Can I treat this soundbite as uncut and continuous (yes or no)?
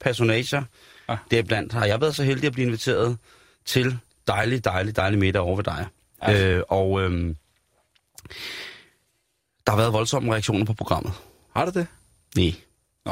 yes